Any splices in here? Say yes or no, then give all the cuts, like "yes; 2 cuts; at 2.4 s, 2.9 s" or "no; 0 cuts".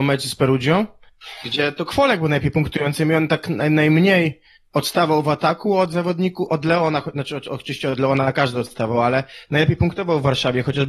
no; 0 cuts